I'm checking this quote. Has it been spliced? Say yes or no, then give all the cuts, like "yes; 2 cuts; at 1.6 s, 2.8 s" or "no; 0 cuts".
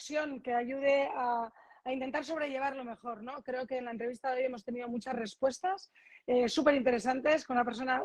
no; 0 cuts